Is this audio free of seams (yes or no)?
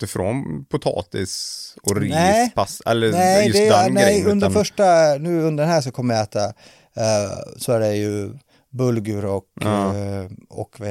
yes